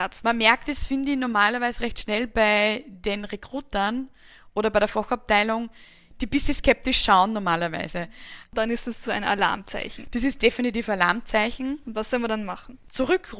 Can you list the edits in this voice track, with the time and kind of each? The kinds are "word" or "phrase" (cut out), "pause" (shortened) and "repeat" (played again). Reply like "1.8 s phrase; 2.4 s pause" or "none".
none